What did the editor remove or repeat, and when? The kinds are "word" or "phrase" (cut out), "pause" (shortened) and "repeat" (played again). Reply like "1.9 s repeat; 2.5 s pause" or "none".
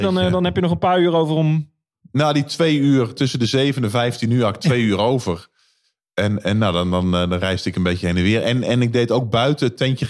none

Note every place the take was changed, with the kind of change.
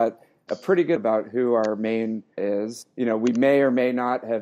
1.0 s word; 2.4 s word

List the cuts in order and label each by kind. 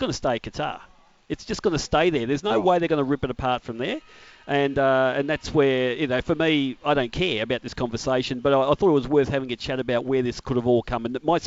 none

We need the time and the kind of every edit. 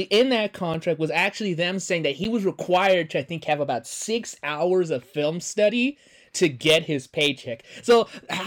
none

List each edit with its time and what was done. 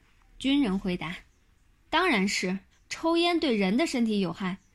1.3 s pause; 2.7 s pause

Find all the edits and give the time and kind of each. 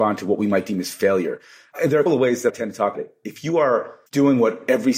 2.1 s word; 2.5 s word; 2.9 s word; 4.1 s pause

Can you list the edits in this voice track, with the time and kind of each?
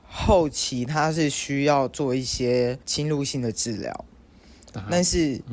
2.8 s pause

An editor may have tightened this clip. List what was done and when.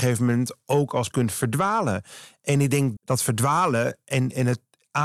1.1 s word; 3.0 s word

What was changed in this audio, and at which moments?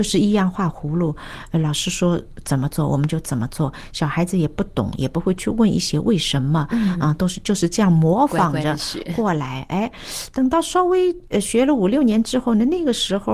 none

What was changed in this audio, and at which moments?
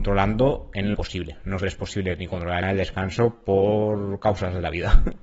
0.9 s word; 1.6 s word; 2.6 s phrase

